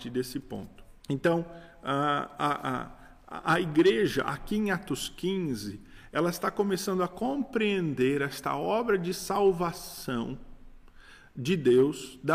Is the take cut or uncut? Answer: cut